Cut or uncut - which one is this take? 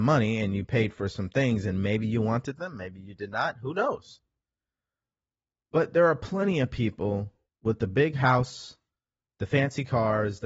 uncut